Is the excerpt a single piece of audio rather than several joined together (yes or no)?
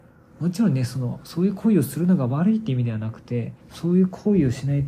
no